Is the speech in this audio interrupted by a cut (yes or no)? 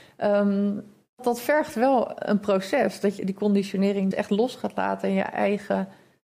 yes